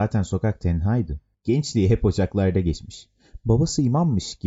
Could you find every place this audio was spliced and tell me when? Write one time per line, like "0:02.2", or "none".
0:01.3